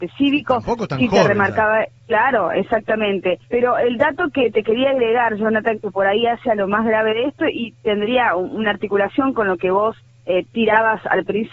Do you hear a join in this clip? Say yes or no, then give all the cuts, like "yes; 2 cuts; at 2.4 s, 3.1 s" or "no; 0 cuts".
yes; 3 cuts; at 2.0 s, 3.4 s, 10.0 s